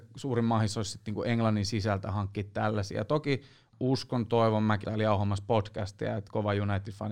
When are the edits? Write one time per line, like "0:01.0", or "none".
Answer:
0:03.7
0:04.8